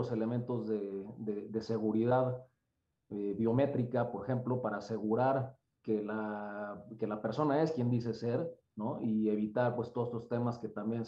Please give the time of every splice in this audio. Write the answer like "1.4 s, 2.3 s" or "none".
none